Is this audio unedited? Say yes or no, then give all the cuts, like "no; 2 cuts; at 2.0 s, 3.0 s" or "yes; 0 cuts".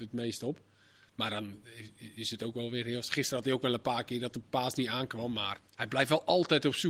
no; 1 cut; at 5.7 s